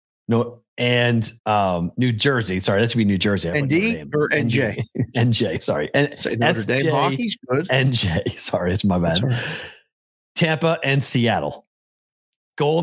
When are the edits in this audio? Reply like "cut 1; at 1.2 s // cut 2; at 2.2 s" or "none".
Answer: cut 1; at 1.4 s